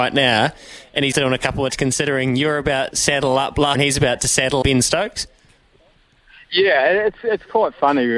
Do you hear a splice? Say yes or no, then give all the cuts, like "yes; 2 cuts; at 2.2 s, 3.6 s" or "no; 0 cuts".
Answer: yes; 5 cuts; at 1.1 s, 1.7 s, 2.9 s, 3.7 s, 4.6 s